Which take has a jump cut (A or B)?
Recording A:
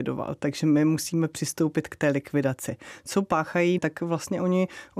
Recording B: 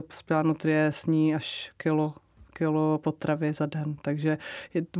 A